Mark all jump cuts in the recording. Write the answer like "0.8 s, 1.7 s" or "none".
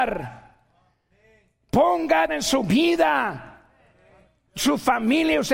2.3 s